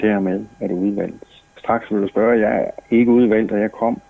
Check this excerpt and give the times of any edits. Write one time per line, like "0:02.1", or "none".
0:01.5